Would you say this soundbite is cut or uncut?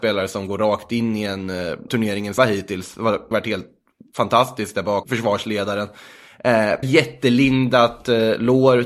cut